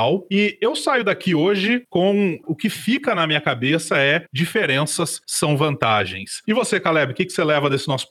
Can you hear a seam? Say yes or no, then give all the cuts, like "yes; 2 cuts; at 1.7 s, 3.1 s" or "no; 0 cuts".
no; 0 cuts